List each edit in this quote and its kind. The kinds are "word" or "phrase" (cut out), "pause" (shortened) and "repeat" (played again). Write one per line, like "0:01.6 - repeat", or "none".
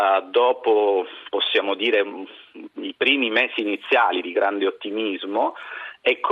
none